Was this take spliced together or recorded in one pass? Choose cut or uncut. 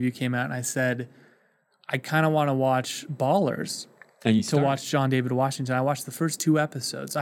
uncut